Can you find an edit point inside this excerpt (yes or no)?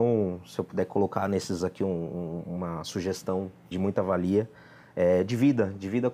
yes